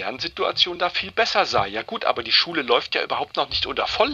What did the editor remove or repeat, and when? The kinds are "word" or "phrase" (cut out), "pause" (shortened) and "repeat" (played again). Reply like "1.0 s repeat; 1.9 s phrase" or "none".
none